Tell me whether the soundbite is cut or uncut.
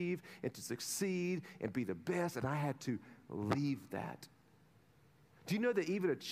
uncut